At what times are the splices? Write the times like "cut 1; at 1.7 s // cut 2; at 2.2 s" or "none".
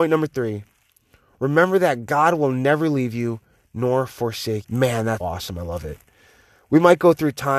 cut 1; at 4.6 s // cut 2; at 5.2 s